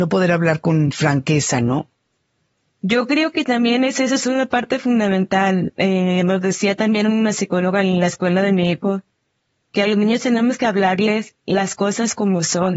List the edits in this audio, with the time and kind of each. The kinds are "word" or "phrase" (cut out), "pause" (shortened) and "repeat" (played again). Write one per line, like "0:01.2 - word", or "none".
none

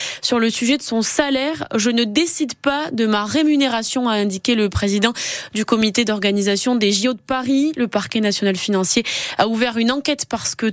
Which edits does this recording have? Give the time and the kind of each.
none

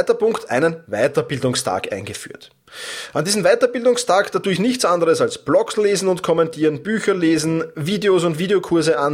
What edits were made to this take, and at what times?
none

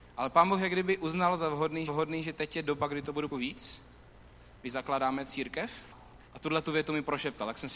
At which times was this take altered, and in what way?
0:01.9 - repeat
0:03.3 - phrase
0:06.3 - pause

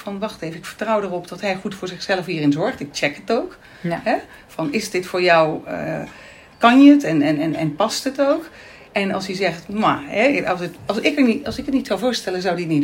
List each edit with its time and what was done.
0:10.9 - word

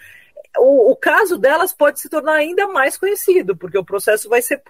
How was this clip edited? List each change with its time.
none

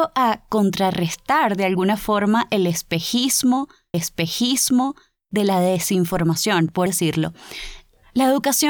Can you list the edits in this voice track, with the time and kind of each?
0:03.9 - repeat
0:06.9 - word

